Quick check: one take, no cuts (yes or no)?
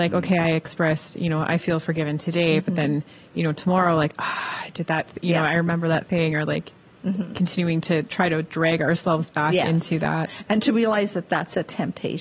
yes